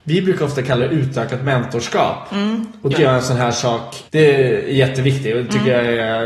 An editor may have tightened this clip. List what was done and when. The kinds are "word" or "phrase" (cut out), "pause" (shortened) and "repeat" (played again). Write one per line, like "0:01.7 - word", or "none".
0:02.9 - word
0:04.1 - pause